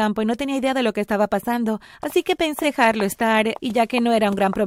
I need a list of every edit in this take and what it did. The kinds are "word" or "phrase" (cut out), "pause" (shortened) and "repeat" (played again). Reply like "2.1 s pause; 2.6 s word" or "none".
2.6 s word; 3.6 s word